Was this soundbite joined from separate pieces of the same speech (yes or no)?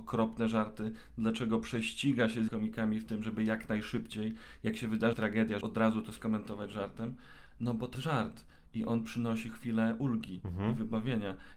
yes